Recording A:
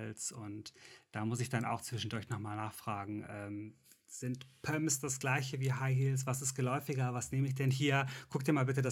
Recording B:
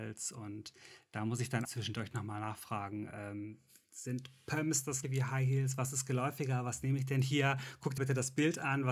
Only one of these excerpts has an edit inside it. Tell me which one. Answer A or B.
B